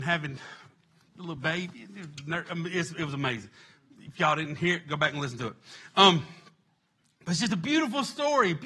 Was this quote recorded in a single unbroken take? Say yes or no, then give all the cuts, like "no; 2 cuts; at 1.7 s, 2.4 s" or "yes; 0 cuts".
yes; 0 cuts